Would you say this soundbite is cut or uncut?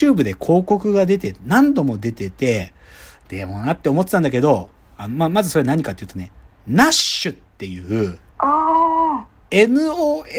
cut